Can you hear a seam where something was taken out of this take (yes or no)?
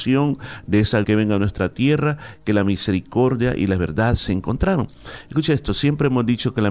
yes